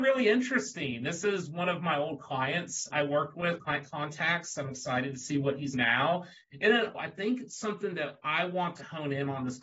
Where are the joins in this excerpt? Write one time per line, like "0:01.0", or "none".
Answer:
0:02.9
0:05.7
0:06.9